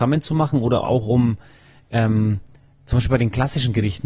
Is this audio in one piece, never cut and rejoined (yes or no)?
yes